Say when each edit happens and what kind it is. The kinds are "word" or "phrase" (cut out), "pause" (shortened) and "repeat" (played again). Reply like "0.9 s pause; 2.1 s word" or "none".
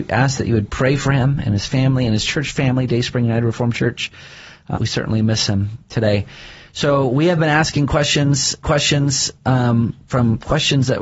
4.7 s word; 8.6 s repeat